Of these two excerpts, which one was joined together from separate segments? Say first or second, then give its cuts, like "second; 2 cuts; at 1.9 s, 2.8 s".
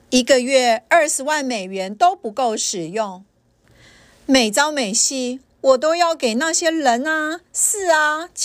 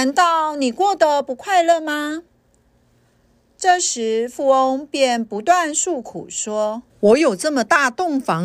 second; 1 cut; at 6.9 s